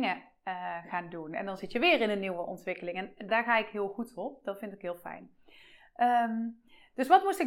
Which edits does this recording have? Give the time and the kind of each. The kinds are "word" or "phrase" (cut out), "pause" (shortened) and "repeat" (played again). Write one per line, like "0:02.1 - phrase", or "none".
0:03.3 - word

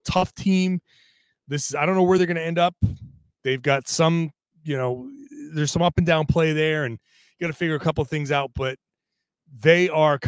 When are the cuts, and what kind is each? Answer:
none

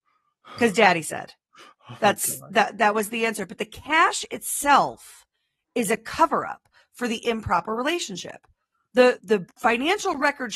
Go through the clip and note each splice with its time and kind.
0:09.2 - word

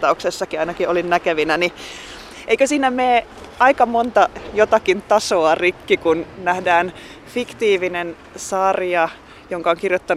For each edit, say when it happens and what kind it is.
none

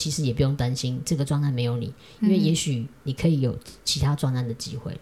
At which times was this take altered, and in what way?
none

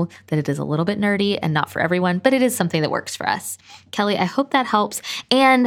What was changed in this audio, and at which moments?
none

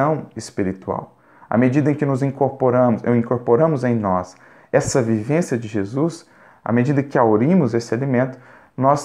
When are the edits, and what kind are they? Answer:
none

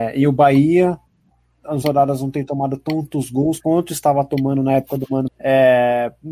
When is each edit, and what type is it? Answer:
0:01.8 - word
0:03.6 - word
0:05.3 - word

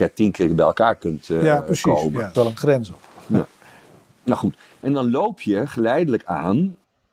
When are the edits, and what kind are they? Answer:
0:02.3 - word

